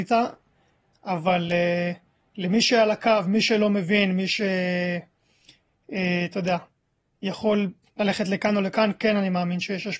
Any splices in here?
no; 0 cuts

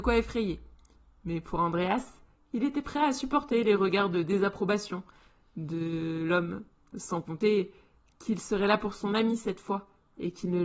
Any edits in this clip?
no; 0 cuts

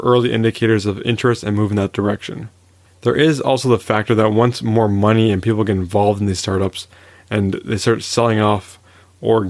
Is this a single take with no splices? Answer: yes; 0 cuts

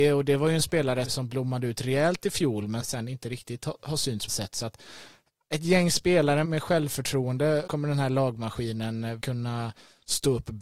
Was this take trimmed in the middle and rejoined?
yes; 6 cuts; at 1.0 s, 2.8 s, 4.3 s, 6.4 s, 7.7 s, 9.2 s

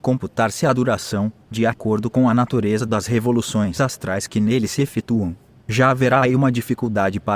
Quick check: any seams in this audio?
no; 0 cuts

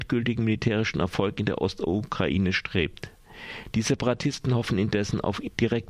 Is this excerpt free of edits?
yes; 0 cuts

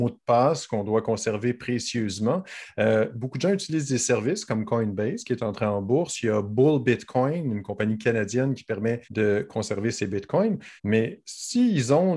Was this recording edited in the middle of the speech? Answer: yes; 2 cuts; at 9.0 s, 10.8 s

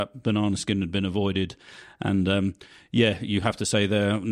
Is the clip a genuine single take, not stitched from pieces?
yes; 0 cuts

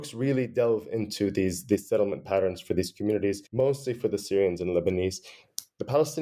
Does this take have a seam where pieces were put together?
yes; 1 cut; at 3.5 s

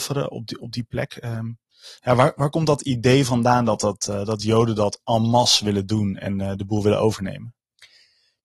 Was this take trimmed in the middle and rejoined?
no; 0 cuts

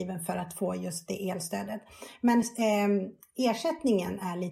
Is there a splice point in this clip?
no; 0 cuts

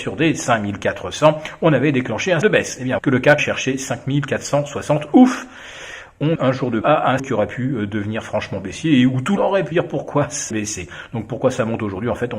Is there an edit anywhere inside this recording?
yes; 9 cuts; at 2.4 s, 3.0 s, 3.4 s, 6.4 s, 6.8 s, 7.2 s, 9.4 s, 9.7 s, 10.5 s

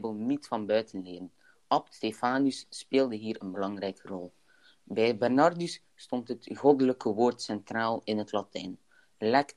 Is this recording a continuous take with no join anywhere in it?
yes; 0 cuts

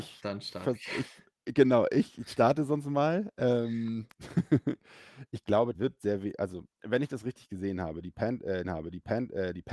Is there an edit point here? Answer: yes; 3 cuts; at 5.7 s, 6.7 s, 8.6 s

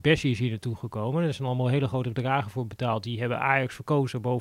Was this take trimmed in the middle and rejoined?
no; 0 cuts

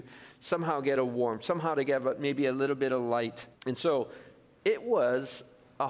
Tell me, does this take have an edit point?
yes; 2 cuts; at 1.0 s, 3.5 s

